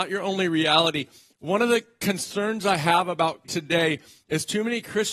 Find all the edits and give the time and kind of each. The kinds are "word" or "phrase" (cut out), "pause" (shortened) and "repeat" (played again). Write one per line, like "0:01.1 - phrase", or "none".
0:03.4 - word